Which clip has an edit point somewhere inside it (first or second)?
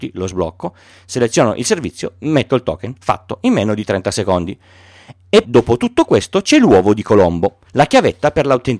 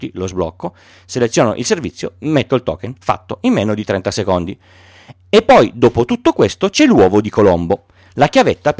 first